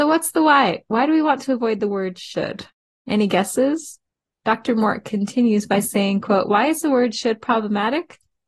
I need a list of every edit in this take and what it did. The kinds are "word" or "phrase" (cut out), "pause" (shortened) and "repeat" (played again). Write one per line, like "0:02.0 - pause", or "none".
none